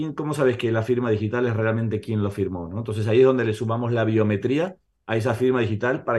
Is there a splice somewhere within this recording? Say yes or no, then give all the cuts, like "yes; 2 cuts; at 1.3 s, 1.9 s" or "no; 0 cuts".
no; 0 cuts